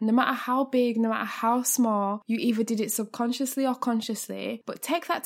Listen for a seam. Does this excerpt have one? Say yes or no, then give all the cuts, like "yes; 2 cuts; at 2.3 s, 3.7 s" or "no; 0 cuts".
no; 0 cuts